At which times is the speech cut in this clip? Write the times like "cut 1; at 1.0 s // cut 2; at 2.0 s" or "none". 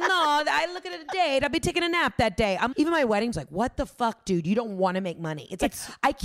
cut 1; at 2.7 s // cut 2; at 3.3 s